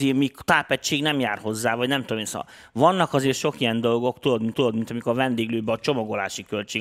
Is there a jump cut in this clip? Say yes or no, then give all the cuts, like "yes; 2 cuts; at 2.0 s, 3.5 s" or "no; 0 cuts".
yes; 1 cut; at 4.5 s